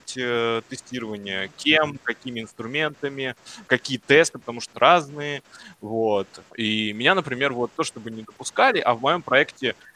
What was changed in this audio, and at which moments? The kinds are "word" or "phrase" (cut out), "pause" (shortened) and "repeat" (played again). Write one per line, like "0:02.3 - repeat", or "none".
0:03.7 - word
0:04.7 - phrase
0:06.5 - pause
0:07.7 - phrase